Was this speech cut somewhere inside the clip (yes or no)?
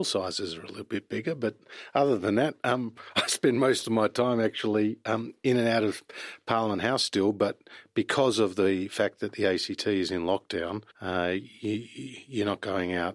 yes